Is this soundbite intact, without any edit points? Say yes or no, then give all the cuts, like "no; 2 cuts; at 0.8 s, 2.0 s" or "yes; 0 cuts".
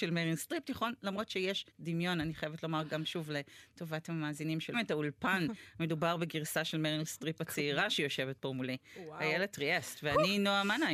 no; 2 cuts; at 1.7 s, 4.7 s